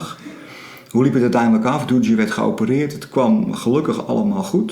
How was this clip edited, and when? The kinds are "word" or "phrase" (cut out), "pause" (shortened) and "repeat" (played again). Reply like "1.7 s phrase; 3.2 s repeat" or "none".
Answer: none